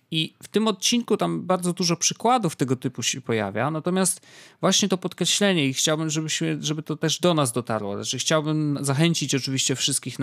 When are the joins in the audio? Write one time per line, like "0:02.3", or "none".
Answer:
none